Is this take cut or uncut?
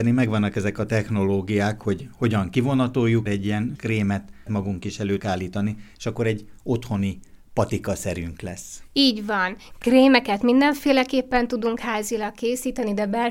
cut